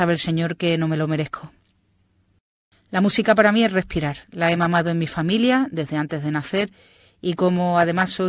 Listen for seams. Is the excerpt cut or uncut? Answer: uncut